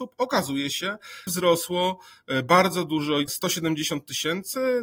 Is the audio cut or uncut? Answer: cut